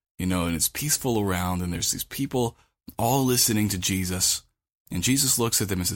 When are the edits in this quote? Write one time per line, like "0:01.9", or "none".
none